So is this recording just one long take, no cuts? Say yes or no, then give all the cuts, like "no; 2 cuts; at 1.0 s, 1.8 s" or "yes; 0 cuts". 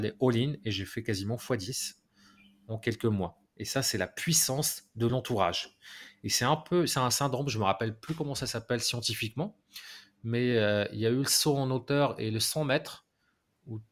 yes; 0 cuts